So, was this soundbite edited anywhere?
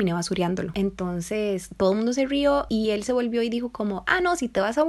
no; 0 cuts

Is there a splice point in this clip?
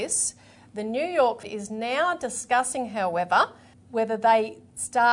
yes; 2 cuts; at 1.4 s, 3.7 s

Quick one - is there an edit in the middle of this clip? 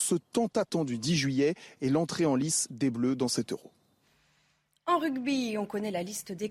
no; 0 cuts

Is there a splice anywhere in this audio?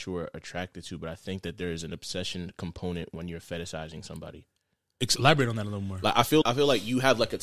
yes; 1 cut; at 6.4 s

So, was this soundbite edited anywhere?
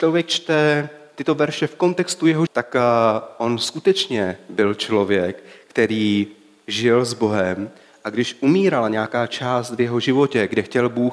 yes; 1 cut; at 2.5 s

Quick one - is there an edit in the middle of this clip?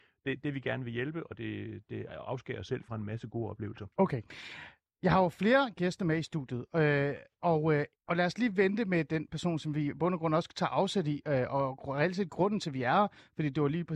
yes; 2 cuts; at 3.9 s, 8.0 s

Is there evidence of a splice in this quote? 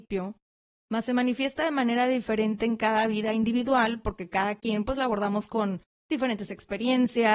no; 0 cuts

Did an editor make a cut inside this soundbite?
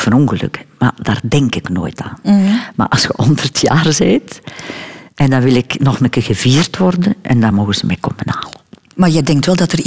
no; 0 cuts

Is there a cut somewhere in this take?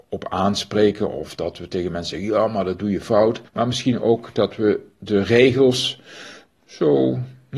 yes; 1 cut; at 3.5 s

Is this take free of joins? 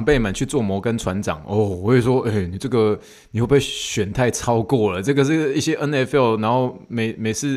yes; 0 cuts

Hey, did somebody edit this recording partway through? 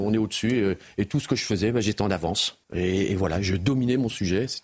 yes; 1 cut; at 2.6 s

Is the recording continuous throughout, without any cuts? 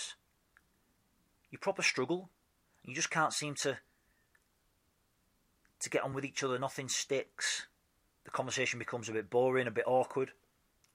yes; 0 cuts

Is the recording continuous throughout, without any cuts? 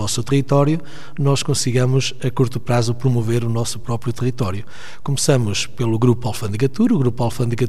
yes; 0 cuts

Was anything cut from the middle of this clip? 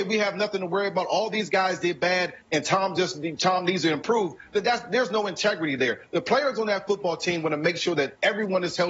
no; 0 cuts

